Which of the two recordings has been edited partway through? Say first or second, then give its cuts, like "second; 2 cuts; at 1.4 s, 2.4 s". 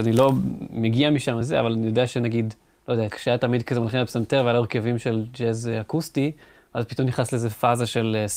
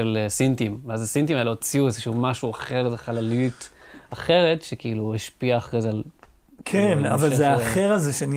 first; 2 cuts; at 1.4 s, 3.1 s